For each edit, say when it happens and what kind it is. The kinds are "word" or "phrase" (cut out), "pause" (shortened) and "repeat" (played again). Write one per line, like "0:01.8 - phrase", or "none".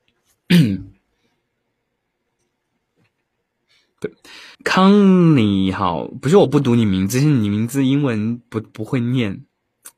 0:04.5 - pause